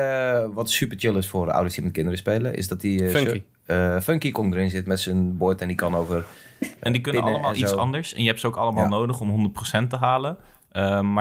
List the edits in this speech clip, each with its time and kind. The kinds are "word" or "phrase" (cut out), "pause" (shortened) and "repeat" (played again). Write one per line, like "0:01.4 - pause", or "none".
none